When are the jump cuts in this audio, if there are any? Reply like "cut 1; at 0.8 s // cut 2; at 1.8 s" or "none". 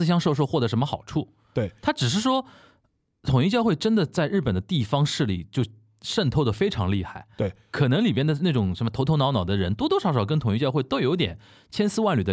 none